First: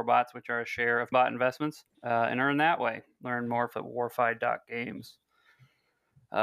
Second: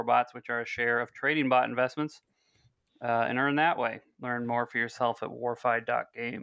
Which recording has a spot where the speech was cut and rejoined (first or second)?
first